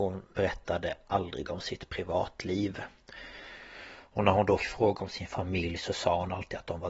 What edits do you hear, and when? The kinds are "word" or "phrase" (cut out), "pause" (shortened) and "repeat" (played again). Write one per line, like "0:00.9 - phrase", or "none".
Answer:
0:04.6 - word